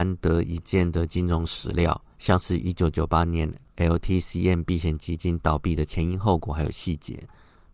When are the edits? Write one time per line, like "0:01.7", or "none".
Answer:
0:02.1